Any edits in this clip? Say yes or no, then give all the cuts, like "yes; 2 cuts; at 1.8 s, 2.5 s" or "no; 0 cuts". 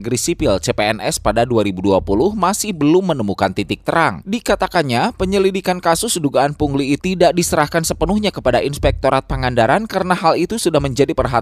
yes; 1 cut; at 7.0 s